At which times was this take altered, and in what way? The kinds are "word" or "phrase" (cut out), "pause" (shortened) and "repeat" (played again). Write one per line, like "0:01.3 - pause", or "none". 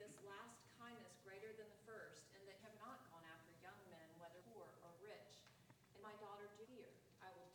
0:02.6 - word
0:04.4 - pause
0:06.0 - word
0:06.6 - word